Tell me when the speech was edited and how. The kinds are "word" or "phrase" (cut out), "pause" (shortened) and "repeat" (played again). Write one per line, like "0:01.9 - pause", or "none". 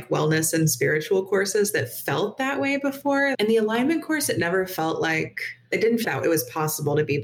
0:06.0 - word

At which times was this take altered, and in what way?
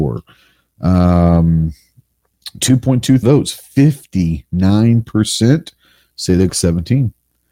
0:03.2 - word
0:06.5 - word

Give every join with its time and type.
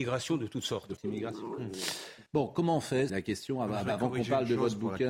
0:01.0 - word
0:02.3 - pause
0:03.1 - word

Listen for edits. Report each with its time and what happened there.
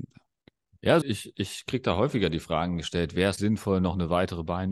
0:01.0 - word
0:03.4 - word

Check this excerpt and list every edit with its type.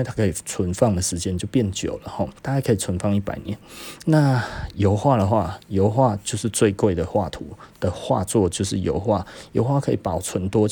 0:02.4 - pause

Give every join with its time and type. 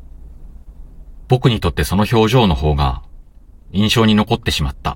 none

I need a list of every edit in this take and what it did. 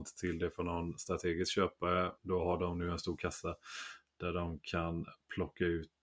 0:02.2 - pause

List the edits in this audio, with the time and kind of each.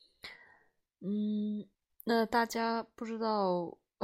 0:01.7 - pause

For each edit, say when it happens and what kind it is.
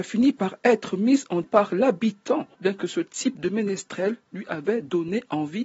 0:01.4 - word
0:02.5 - pause

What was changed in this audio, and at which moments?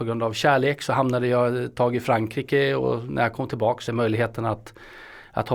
0:03.9 - phrase

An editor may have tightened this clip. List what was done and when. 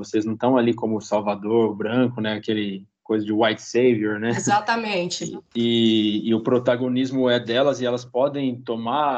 none

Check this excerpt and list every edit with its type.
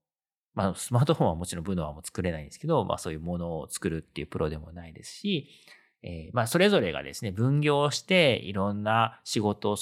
none

